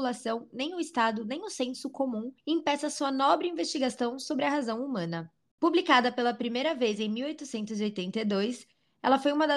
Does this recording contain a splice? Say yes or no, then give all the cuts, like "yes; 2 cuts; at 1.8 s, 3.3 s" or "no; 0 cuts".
yes; 1 cut; at 2.4 s